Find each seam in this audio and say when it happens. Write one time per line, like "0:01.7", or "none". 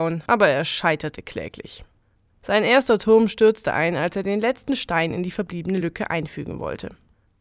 none

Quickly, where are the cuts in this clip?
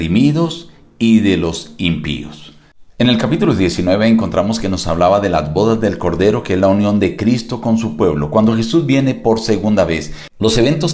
0:02.9

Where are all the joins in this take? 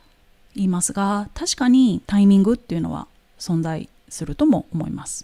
0:02.0
0:04.0

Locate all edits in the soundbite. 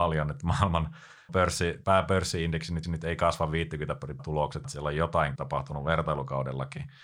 0:01.3
0:01.8
0:02.8
0:04.2
0:04.6
0:05.4

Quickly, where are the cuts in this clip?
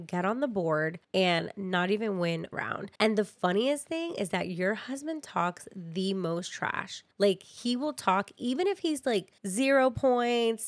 0:01.0
0:02.5
0:03.0
0:07.1
0:09.4

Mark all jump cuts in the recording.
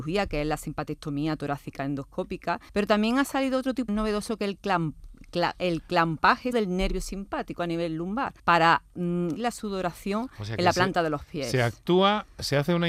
0:02.7
0:03.9
0:06.5
0:08.4
0:09.4

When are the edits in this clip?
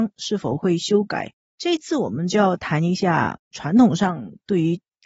0:03.4

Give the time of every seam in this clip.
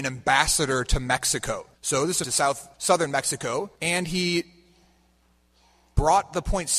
0:01.7
0:02.2
0:02.7
0:03.8

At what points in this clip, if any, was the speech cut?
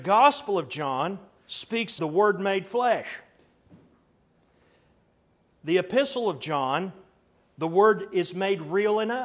0:02.0

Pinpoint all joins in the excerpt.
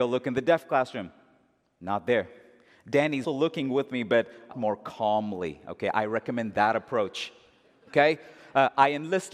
0:03.2
0:04.5

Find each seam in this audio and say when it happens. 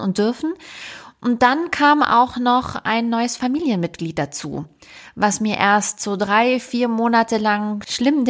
none

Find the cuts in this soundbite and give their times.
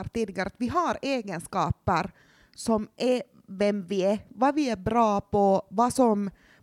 none

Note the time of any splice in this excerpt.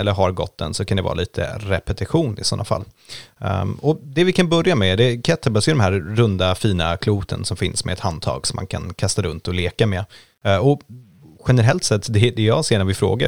none

